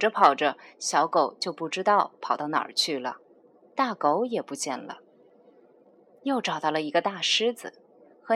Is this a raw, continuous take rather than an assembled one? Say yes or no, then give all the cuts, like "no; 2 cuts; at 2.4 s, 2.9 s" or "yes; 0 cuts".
yes; 0 cuts